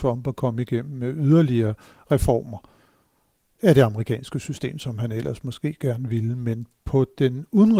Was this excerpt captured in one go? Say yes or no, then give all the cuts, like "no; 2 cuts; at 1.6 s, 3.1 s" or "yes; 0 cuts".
yes; 0 cuts